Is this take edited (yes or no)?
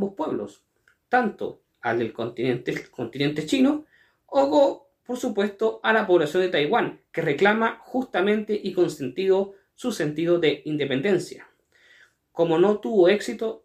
yes